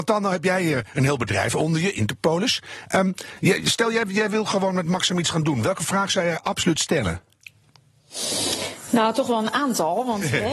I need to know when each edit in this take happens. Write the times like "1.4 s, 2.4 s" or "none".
none